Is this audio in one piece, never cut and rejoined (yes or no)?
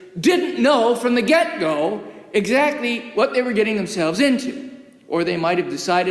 yes